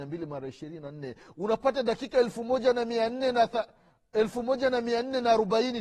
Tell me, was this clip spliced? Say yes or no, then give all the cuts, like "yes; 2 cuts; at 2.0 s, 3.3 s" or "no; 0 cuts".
no; 0 cuts